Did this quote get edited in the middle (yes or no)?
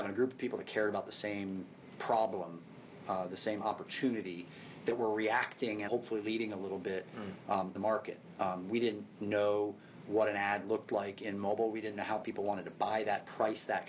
yes